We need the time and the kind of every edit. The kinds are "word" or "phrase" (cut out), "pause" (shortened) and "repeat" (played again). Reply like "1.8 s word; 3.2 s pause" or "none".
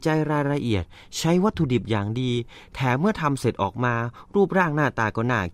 none

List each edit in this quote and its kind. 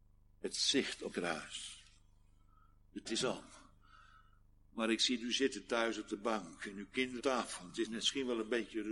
1.1 s word; 3.1 s word; 7.2 s word; 7.9 s word

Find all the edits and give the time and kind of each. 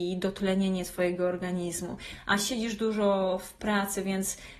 none

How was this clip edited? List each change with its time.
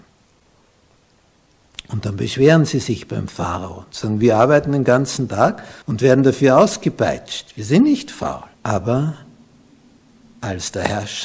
5.8 s pause; 8.5 s pause

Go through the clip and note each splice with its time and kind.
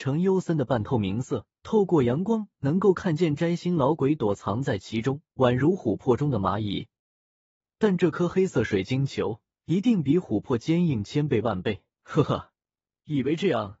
1.6 s pause; 5.3 s pause; 9.5 s pause; 11.9 s pause

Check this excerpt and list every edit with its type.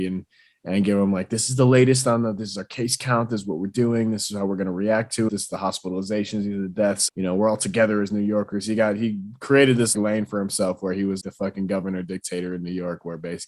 5.3 s word; 7.1 s word; 9.9 s word; 11.2 s word

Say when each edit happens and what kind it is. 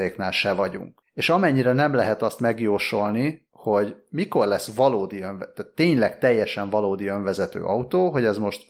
none

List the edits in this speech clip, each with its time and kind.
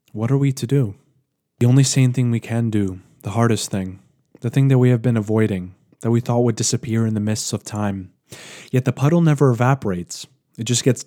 none

